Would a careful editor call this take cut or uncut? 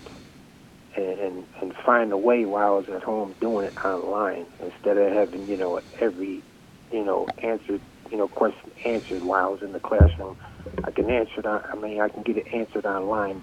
cut